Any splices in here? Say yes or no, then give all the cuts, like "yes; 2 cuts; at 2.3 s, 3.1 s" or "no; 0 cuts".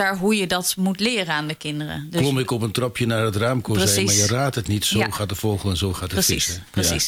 no; 0 cuts